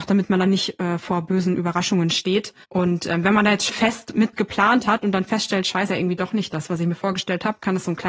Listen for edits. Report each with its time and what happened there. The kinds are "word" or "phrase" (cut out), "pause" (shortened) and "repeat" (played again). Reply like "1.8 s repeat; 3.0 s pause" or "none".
2.6 s pause; 3.7 s word; 5.9 s phrase

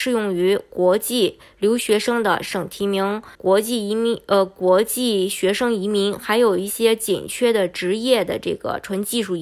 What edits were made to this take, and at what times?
3.3 s pause

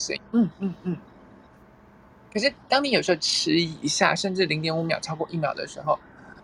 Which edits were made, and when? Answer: none

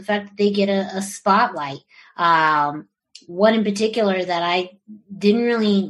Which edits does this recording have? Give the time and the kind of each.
none

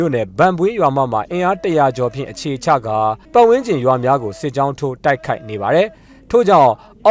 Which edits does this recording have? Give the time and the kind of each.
3.2 s pause

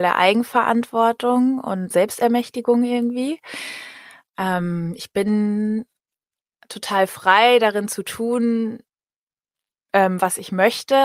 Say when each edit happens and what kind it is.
1.9 s word

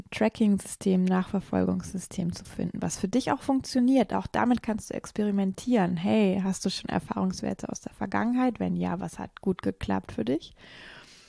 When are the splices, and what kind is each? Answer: none

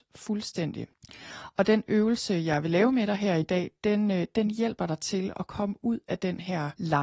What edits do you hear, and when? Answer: none

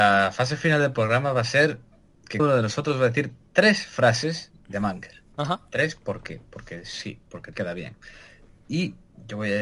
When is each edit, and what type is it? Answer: 2.4 s word; 5.3 s pause; 7.5 s word

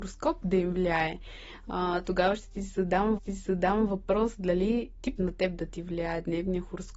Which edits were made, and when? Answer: 3.2 s repeat; 5.2 s word

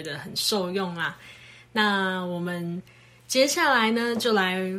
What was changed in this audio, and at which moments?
none

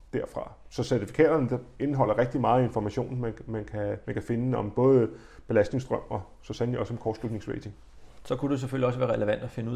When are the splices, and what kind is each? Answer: 4.0 s pause

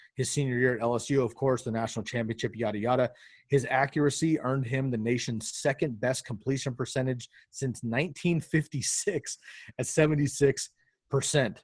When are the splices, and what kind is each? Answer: none

